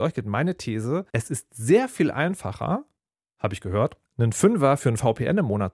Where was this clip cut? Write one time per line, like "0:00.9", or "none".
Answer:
0:01.1
0:03.0
0:04.1